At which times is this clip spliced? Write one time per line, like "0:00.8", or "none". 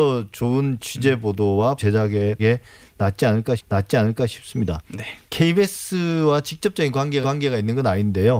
0:01.8
0:02.4
0:03.6
0:05.2
0:07.2